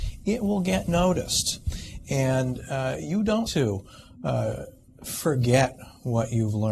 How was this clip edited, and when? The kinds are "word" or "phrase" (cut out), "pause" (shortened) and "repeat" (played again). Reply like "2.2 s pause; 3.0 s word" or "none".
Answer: 3.5 s word